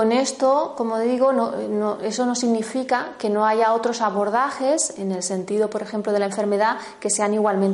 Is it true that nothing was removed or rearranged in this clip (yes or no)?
yes